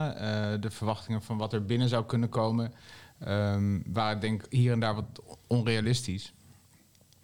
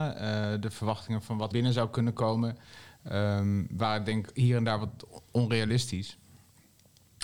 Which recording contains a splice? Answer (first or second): second